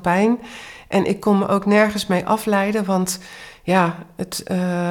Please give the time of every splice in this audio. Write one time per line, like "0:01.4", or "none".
none